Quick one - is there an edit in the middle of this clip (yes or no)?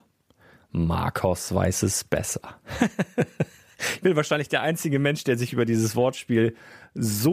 no